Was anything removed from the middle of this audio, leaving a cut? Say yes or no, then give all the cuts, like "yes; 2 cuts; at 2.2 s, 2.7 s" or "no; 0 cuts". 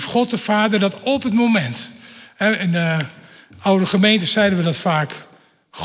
no; 0 cuts